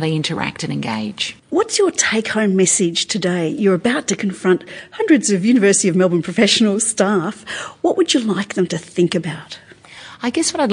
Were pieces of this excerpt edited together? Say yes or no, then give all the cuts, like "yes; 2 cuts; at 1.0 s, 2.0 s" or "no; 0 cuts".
yes; 1 cut; at 1.4 s